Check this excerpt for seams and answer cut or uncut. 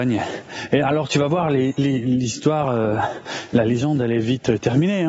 uncut